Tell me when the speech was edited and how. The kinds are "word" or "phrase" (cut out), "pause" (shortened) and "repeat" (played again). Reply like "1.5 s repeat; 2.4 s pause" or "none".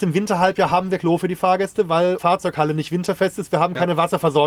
1.0 s word; 2.2 s word